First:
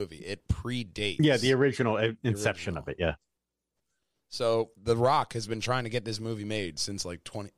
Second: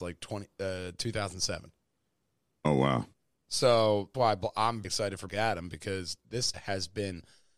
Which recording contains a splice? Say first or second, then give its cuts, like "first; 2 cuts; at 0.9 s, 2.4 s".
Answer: second; 4 cuts; at 4.1 s, 4.8 s, 5.3 s, 6.5 s